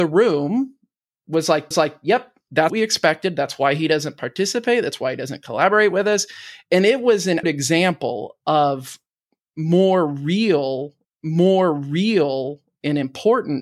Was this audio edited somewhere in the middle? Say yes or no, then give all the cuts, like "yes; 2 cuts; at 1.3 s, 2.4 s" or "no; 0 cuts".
yes; 4 cuts; at 1.7 s, 2.7 s, 7.4 s, 11.0 s